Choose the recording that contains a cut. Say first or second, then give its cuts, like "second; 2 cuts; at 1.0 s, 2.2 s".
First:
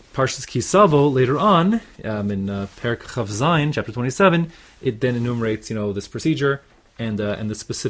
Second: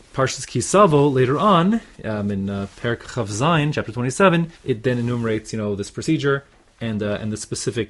second; 1 cut; at 4.6 s